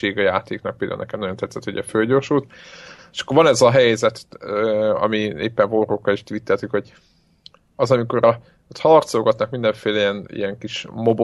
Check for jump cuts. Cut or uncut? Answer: uncut